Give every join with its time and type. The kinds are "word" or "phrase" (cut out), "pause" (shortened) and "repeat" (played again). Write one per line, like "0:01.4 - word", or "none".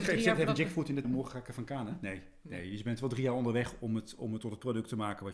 0:01.0 - word

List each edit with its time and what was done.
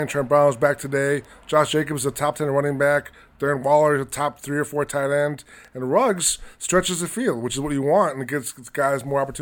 none

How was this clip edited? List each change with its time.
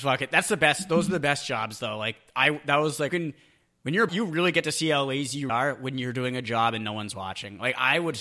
0:03.1 - phrase
0:04.1 - word
0:05.5 - word

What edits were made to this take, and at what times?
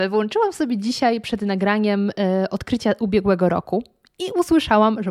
none

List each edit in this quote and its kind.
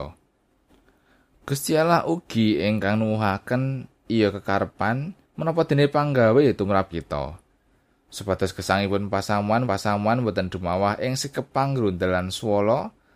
0:05.2 - pause
0:06.9 - word
0:09.6 - repeat

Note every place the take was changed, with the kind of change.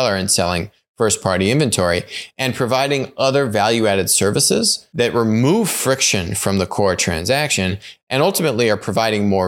none

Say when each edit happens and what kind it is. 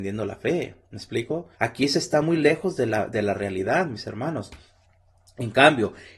0:01.5 - pause

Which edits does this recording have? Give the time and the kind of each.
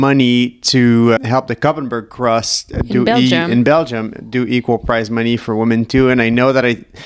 0:01.2 - word

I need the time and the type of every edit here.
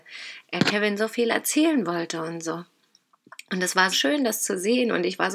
0:03.9 - word

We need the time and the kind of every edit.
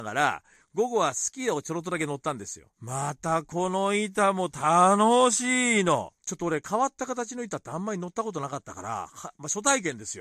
0:02.7 - pause
0:06.2 - pause

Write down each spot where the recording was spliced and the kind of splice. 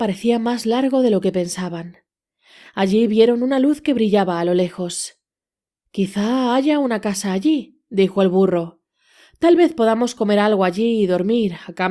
none

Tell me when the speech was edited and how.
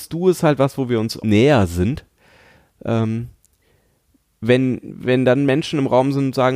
0:01.2 - word

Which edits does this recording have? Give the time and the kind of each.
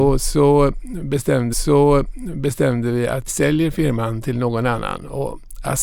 0:01.5 - repeat
0:03.3 - word

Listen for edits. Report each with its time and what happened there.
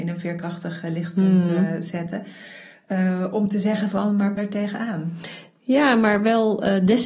0:04.4 - phrase

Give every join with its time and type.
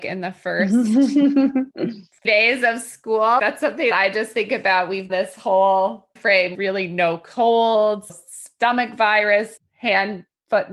0:02.2 - word
0:03.4 - word
0:03.9 - word
0:05.1 - word
0:06.2 - word
0:06.5 - word
0:08.1 - word
0:09.6 - word

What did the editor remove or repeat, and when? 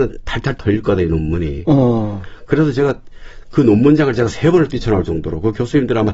none

